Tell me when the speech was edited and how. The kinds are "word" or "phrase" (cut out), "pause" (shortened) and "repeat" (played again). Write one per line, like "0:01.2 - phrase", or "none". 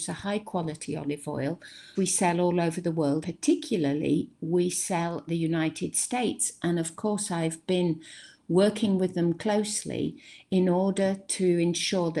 0:01.9 - word
0:03.2 - word
0:05.3 - word

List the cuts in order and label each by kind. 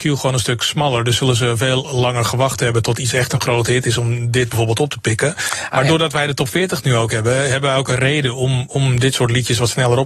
none

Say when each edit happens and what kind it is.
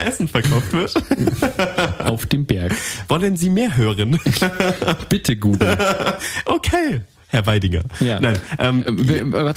none

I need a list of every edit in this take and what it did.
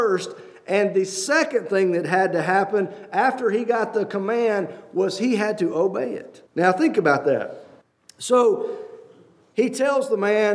0:06.5 - pause
0:07.8 - pause

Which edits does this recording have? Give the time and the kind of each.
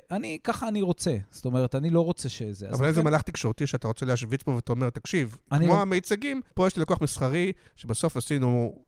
0:06.5 - pause

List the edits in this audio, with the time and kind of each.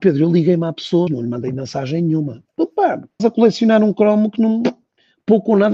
0:01.1 - word
0:03.2 - word

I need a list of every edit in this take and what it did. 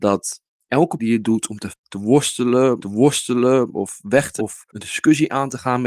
0:01.0 - word
0:01.7 - word
0:02.8 - repeat
0:04.4 - word
0:04.7 - pause

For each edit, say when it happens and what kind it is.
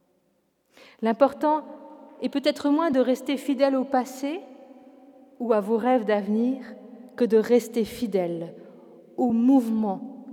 none

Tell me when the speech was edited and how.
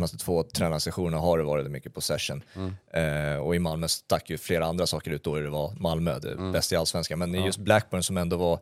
0:01.6 - word

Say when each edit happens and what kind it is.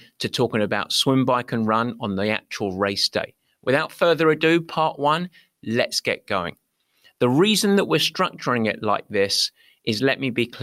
none

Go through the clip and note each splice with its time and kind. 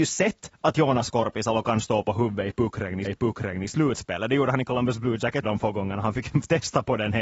0:03.0 - repeat
0:05.4 - word

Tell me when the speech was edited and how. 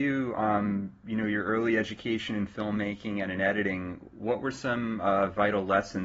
none

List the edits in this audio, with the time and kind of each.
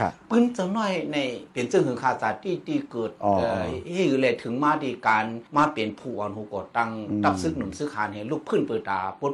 0:01.5 - pause
0:05.5 - pause

